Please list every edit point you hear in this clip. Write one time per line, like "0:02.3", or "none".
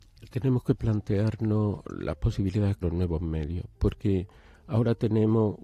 0:02.8